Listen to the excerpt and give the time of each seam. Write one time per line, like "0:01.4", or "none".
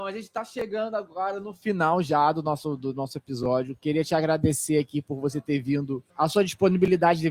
0:06.1